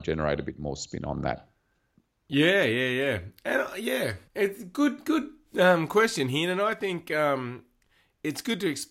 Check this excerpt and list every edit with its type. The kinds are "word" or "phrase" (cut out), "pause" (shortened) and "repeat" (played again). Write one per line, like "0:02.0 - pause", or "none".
0:04.3 - pause